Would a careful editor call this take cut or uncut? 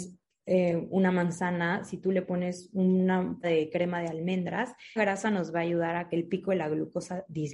cut